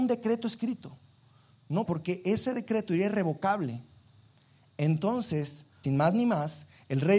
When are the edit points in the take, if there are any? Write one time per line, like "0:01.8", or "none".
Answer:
0:01.9
0:05.8